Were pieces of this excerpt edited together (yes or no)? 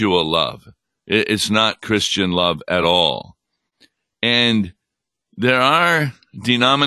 no